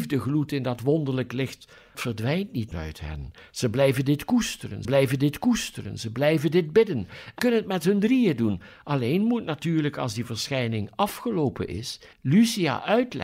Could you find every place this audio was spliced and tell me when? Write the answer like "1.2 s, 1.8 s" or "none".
1.9 s, 2.7 s, 4.8 s, 7.4 s, 12.1 s